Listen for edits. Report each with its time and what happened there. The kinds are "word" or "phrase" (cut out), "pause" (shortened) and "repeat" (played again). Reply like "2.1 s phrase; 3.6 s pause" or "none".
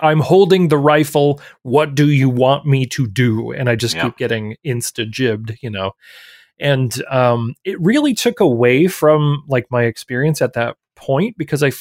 none